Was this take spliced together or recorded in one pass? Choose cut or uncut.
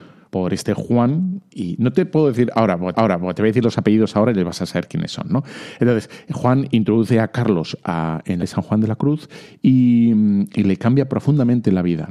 cut